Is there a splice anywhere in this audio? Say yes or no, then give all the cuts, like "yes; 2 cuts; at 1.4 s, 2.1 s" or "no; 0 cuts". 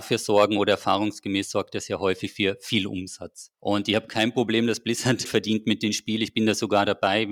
yes; 2 cuts; at 3.5 s, 5.2 s